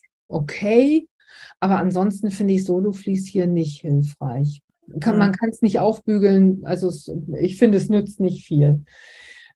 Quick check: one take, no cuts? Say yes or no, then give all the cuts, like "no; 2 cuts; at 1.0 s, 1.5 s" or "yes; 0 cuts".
yes; 0 cuts